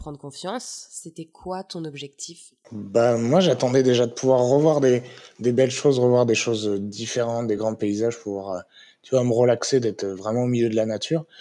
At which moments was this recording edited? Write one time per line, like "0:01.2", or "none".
none